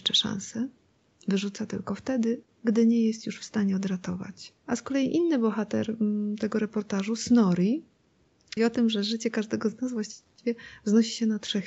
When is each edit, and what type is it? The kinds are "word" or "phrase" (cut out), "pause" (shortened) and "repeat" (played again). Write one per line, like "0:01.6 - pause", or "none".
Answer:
0:04.6 - pause
0:08.6 - word